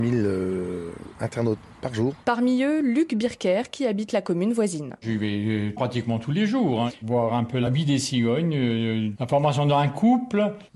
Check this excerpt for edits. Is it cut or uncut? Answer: uncut